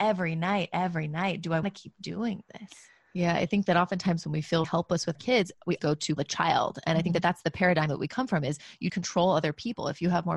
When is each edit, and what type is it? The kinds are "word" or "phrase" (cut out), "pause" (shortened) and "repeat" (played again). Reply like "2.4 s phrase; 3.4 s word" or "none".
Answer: 1.6 s word; 4.6 s word; 5.1 s word; 5.8 s word; 6.2 s word; 8.9 s word

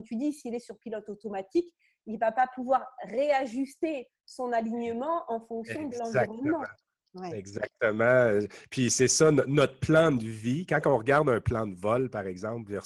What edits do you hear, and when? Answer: none

